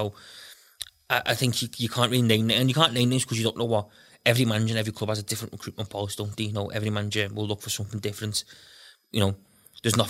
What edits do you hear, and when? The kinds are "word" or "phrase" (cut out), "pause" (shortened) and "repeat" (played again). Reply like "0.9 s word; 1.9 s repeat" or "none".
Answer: none